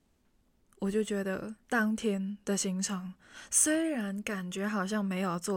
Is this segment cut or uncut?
cut